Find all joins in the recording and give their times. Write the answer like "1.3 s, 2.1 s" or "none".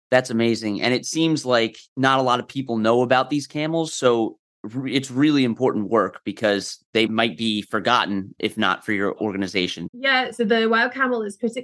1.9 s